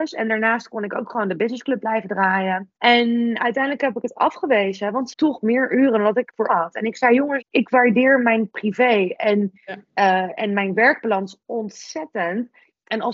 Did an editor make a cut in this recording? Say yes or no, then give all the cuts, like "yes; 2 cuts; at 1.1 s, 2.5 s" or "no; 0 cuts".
yes; 5 cuts; at 2.8 s, 5.1 s, 6.5 s, 7.4 s, 9.8 s